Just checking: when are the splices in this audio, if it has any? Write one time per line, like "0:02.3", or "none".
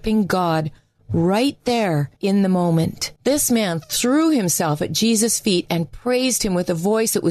0:02.2
0:03.2